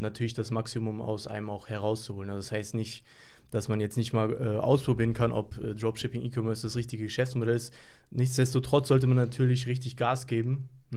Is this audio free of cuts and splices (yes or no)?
yes